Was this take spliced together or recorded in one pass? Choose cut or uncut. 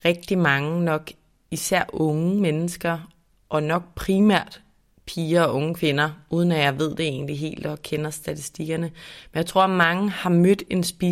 uncut